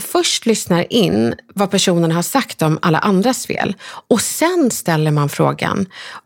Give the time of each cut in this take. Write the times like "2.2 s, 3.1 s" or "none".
none

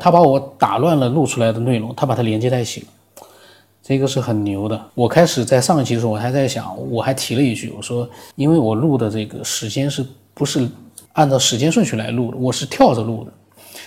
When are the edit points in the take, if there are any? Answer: 4.9 s, 8.3 s, 11.1 s

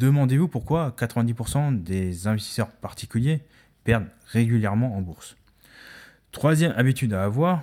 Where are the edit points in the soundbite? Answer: none

